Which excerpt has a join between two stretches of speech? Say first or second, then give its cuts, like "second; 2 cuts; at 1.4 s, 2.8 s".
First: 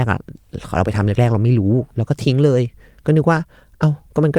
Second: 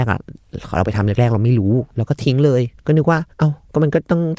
second; 2 cuts; at 2.8 s, 3.3 s